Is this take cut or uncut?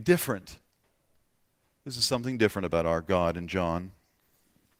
uncut